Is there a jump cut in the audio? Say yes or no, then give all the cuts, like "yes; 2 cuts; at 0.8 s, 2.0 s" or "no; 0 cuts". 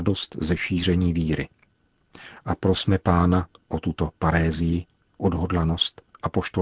no; 0 cuts